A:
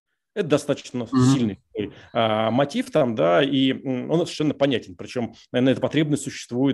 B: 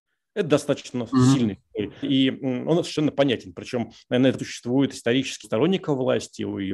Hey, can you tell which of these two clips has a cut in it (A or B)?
B